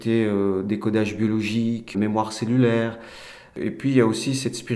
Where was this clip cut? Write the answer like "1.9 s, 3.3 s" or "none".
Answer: 1.9 s